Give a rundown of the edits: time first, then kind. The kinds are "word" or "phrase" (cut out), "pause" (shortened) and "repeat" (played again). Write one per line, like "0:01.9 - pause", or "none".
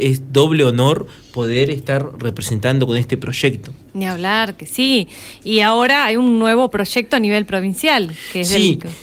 none